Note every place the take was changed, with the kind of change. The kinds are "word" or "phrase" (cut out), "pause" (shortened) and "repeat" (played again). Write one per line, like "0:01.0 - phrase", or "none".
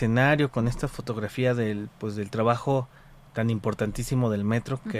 none